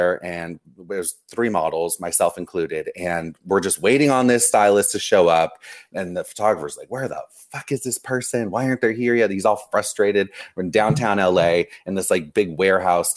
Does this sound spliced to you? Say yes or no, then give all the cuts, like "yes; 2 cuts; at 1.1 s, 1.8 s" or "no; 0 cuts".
no; 0 cuts